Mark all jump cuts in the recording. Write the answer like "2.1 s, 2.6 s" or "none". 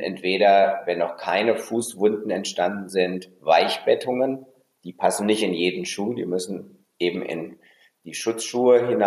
none